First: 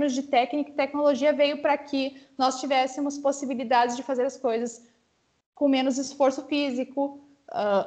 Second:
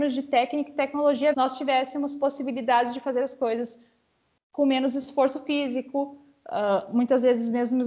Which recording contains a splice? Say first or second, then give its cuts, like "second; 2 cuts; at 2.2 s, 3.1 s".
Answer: second; 1 cut; at 1.3 s